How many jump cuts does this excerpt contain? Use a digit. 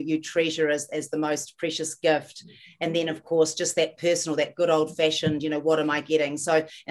0